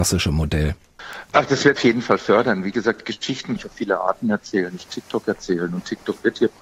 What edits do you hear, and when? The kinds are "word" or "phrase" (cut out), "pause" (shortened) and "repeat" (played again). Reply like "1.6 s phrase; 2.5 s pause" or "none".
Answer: 1.8 s word; 3.6 s word; 4.9 s phrase